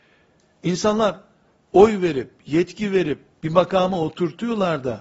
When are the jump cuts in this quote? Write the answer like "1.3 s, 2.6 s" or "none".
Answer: none